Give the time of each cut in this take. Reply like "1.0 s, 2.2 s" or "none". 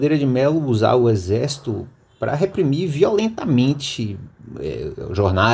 none